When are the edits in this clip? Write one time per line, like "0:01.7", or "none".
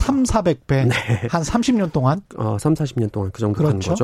0:02.3